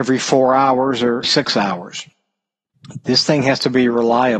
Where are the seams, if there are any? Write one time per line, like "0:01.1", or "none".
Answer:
0:01.2